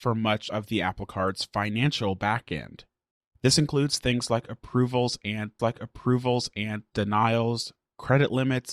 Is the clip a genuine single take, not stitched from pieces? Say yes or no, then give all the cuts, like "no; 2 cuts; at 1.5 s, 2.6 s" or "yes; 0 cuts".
no; 1 cut; at 5.6 s